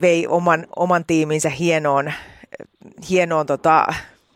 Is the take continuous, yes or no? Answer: yes